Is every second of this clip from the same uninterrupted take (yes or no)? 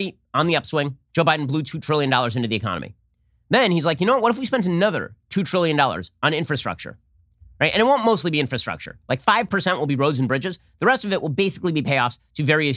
yes